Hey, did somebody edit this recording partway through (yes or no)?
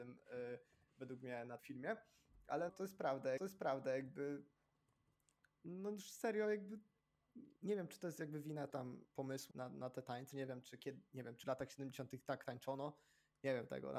yes